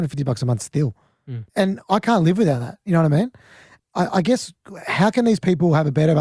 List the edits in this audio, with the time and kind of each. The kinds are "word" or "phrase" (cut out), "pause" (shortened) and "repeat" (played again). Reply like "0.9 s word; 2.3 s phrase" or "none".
none